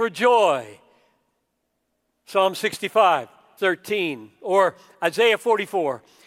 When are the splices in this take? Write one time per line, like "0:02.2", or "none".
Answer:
0:03.6